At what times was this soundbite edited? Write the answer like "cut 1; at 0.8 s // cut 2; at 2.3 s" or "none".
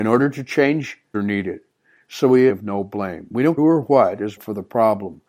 cut 1; at 1.1 s // cut 2; at 2.5 s // cut 3; at 3.6 s // cut 4; at 4.4 s